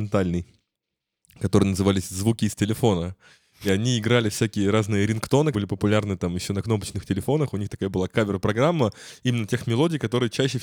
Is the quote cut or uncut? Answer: cut